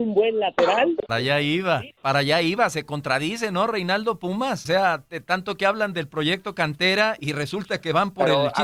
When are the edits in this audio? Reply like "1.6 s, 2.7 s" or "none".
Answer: 1.1 s, 2.0 s, 4.7 s, 7.2 s